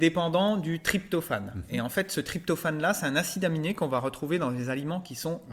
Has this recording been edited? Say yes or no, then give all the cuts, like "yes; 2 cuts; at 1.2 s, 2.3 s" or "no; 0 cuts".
no; 0 cuts